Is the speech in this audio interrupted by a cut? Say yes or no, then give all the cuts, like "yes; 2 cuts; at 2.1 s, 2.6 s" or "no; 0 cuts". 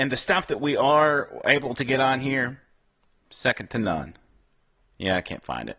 no; 0 cuts